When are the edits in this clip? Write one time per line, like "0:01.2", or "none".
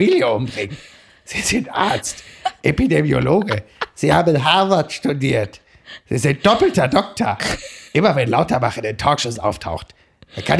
0:07.9

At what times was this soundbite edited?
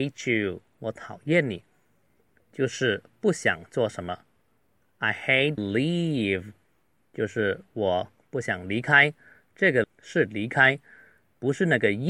0:05.6
0:09.8

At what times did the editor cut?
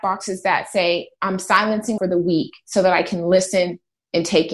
0:02.0

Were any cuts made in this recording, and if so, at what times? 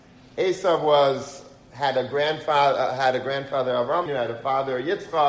0:04.1

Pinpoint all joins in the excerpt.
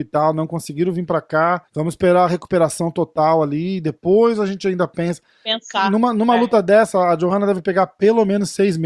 0:01.7

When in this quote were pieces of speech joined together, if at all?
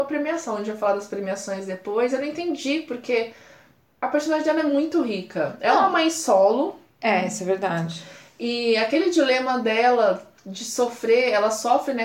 none

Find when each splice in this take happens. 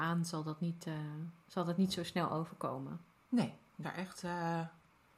0:03.8

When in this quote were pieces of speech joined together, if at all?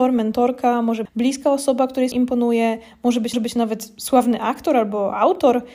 0:01.0
0:02.1
0:03.3

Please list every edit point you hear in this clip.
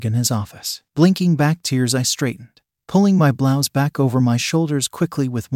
none

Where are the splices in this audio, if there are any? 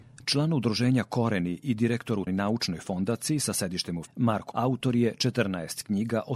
0:02.3
0:04.1
0:04.5

